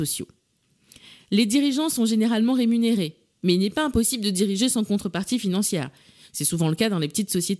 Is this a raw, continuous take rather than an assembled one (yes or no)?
yes